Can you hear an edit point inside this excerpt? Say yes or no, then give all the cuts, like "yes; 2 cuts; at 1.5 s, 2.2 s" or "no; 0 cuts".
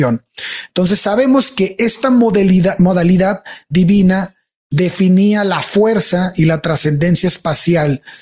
no; 0 cuts